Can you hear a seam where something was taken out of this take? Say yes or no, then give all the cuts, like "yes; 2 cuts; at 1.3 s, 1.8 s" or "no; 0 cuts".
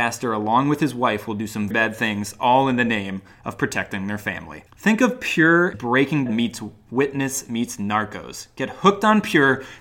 yes; 4 cuts; at 1.7 s, 4.7 s, 5.7 s, 6.3 s